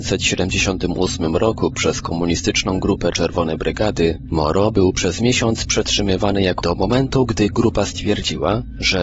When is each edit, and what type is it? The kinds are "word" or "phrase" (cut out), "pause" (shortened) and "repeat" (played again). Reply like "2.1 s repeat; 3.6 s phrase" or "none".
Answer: 3.1 s word; 6.6 s word